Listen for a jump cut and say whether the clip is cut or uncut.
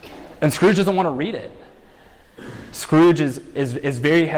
uncut